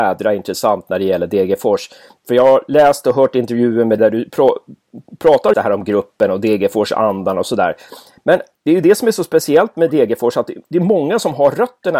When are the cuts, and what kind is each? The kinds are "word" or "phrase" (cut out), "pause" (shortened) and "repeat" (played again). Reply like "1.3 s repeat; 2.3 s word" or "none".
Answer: 4.0 s word; 5.5 s word; 8.5 s word